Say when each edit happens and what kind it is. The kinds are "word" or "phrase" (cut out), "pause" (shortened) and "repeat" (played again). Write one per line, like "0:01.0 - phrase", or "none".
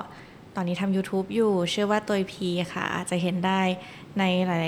none